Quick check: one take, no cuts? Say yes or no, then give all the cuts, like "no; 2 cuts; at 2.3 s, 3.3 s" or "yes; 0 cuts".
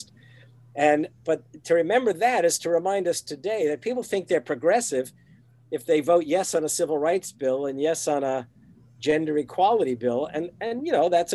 yes; 0 cuts